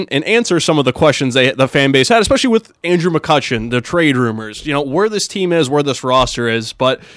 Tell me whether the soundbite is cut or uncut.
uncut